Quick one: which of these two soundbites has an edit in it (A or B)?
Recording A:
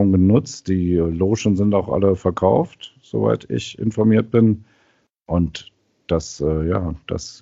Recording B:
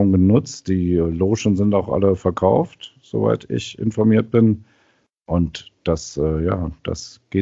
B